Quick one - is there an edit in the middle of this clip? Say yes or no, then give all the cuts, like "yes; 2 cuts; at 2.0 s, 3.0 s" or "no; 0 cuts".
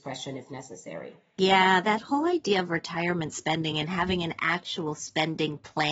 no; 0 cuts